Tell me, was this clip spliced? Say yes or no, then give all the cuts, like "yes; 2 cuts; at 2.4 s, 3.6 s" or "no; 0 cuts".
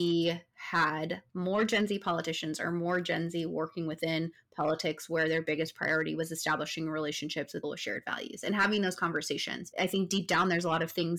yes; 3 cuts; at 1.3 s, 7.6 s, 9.7 s